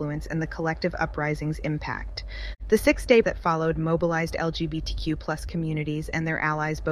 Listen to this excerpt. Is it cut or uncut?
cut